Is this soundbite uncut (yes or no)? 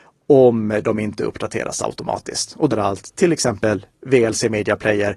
no